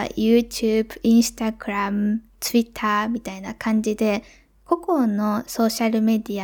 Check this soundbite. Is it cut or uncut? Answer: uncut